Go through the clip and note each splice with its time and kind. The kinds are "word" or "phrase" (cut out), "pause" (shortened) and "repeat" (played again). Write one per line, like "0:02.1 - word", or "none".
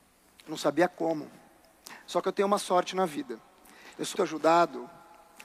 0:04.1 - word